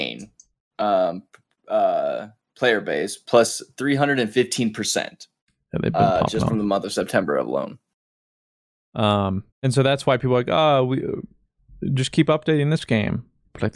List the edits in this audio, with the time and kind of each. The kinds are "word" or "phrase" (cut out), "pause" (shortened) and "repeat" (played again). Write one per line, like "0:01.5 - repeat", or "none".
0:09.5 - pause